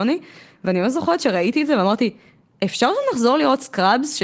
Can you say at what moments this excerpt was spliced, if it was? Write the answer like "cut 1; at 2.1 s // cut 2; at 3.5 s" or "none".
none